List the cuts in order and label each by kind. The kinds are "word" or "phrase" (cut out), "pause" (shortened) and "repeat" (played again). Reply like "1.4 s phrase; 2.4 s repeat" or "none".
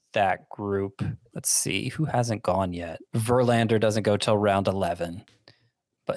1.3 s pause; 3.1 s pause